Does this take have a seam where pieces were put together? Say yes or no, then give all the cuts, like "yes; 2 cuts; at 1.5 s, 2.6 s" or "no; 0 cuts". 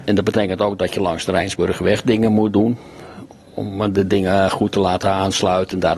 no; 0 cuts